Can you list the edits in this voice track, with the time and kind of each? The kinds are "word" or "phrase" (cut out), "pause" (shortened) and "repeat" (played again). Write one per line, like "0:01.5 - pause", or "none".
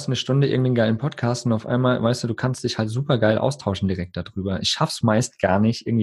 none